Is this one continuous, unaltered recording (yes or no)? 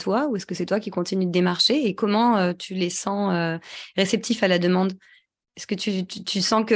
yes